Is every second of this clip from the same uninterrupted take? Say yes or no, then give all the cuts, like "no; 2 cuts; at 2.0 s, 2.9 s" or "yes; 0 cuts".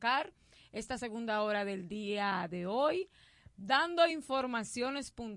yes; 0 cuts